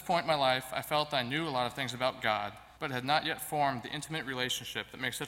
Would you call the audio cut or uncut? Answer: cut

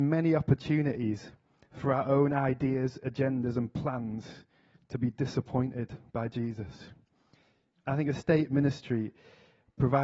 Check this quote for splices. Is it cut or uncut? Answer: uncut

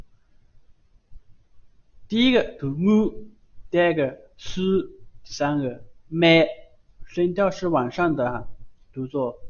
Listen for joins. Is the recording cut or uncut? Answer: uncut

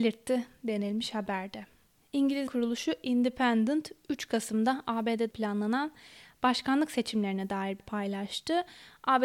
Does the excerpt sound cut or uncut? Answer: cut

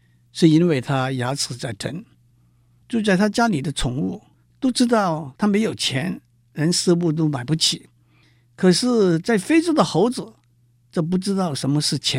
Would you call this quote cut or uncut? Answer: uncut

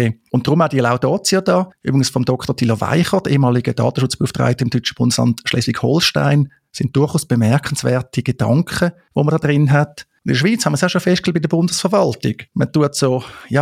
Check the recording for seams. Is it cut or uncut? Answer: uncut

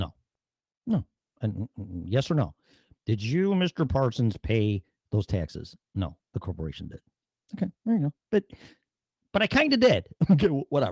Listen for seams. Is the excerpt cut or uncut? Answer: uncut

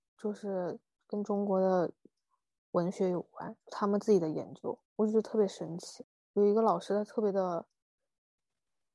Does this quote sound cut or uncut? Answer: cut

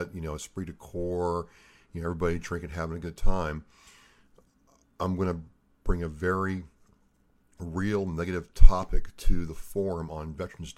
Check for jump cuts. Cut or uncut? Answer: uncut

